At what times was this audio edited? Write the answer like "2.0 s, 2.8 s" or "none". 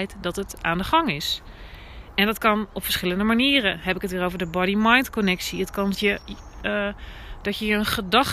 5.9 s